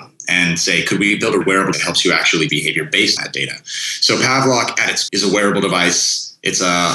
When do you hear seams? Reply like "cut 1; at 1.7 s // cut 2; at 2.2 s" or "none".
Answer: cut 1; at 1.4 s // cut 2; at 1.7 s // cut 3; at 2.5 s // cut 4; at 3.2 s // cut 5; at 5.1 s